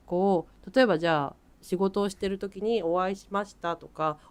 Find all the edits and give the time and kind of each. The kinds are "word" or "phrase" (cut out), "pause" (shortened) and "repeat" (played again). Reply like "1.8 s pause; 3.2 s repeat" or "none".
none